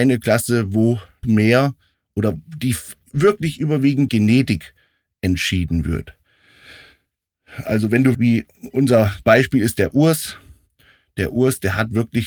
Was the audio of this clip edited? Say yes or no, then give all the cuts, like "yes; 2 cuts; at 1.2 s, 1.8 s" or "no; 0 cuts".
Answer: yes; 6 cuts; at 1.2 s, 1.9 s, 3.0 s, 4.1 s, 8.1 s, 9.2 s